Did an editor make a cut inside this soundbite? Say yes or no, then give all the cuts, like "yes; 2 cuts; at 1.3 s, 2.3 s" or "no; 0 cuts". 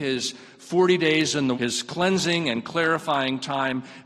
yes; 1 cut; at 1.5 s